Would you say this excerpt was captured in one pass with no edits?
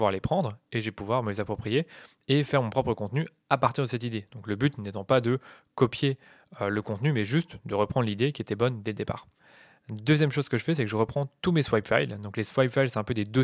yes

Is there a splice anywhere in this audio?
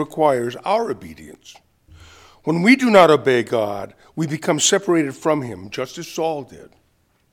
no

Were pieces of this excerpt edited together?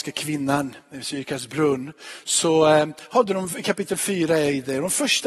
no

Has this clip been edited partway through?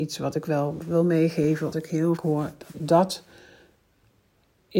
yes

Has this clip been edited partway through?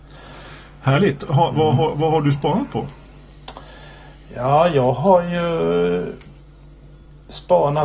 no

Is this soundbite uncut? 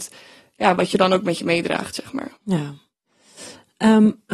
no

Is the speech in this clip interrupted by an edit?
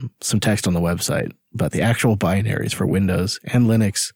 no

